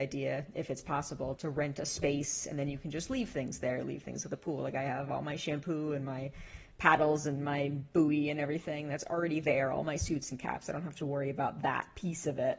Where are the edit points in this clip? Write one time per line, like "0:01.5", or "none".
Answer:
0:01.4

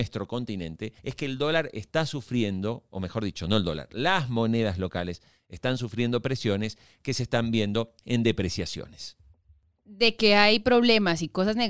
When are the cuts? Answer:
0:01.0
0:08.0

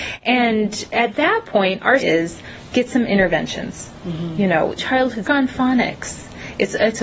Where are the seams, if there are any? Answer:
0:02.0
0:04.8
0:05.2

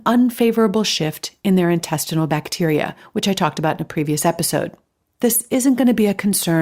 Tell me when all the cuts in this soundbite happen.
none

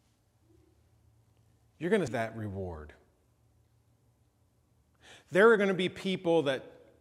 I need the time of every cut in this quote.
0:02.1

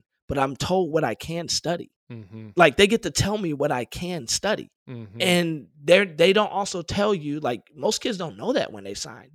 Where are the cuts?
0:02.0
0:04.8

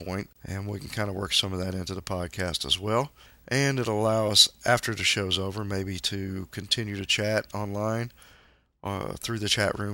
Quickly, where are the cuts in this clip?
none

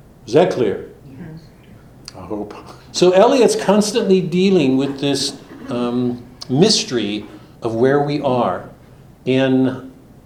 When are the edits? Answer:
0:01.0
0:02.8
0:07.6

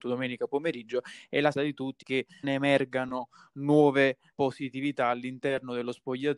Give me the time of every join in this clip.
0:01.5
0:02.0
0:02.4
0:04.3

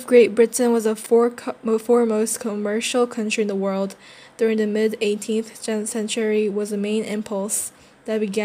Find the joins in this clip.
none

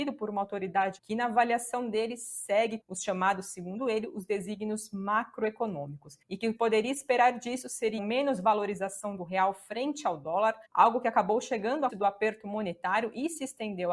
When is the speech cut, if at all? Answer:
0:01.0
0:02.8
0:06.2
0:06.6
0:08.0
0:10.6
0:11.9

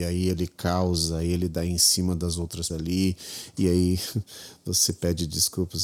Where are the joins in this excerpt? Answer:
0:02.7

